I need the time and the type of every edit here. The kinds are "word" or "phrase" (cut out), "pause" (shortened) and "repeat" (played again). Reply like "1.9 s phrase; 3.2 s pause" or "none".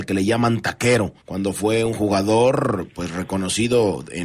1.2 s pause